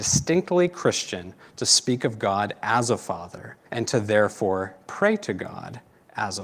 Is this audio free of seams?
no; 1 cut; at 3.7 s

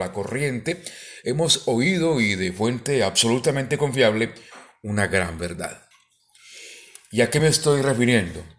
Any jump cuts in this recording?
no; 0 cuts

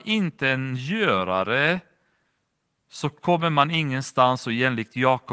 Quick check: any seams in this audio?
no; 0 cuts

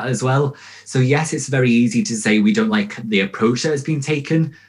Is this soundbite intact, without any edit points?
yes; 0 cuts

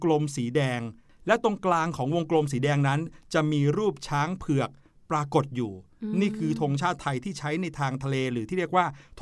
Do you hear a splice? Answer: no; 0 cuts

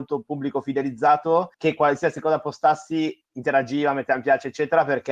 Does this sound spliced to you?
yes; 1 cut; at 1.5 s

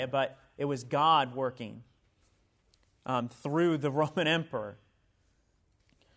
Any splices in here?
no; 0 cuts

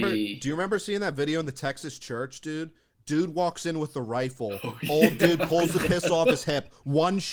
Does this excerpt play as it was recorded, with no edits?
yes; 0 cuts

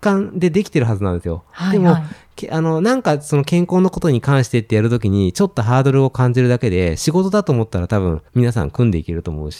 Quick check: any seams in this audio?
yes; 1 cut; at 8.3 s

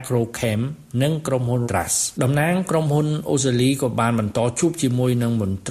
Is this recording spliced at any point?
yes; 2 cuts; at 1.6 s, 2.1 s

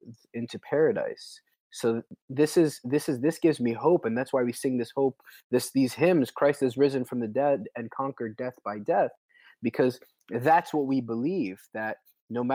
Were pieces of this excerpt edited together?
no; 0 cuts

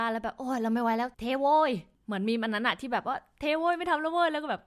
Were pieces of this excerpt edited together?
yes; 1 cut; at 1.1 s

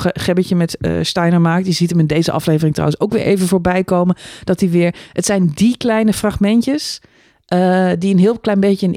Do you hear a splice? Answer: no; 0 cuts

